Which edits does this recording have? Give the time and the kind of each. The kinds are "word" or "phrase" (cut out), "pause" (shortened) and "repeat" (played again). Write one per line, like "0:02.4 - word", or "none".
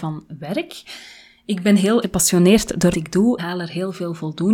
0:02.0 - word
0:02.9 - word
0:03.4 - word